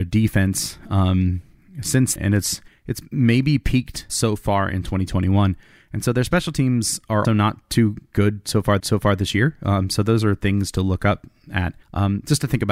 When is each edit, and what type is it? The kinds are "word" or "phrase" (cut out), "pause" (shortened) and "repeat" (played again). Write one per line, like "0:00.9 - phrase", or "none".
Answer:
0:02.2 - word
0:02.7 - pause
0:04.1 - word
0:07.2 - word
0:08.8 - repeat
0:11.8 - pause